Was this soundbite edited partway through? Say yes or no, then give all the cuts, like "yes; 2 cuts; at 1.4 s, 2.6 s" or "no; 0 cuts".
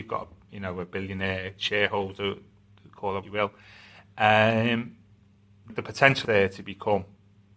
yes; 3 cuts; at 3.2 s, 5.7 s, 6.2 s